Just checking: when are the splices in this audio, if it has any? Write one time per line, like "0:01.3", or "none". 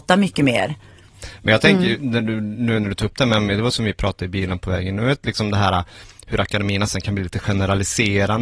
none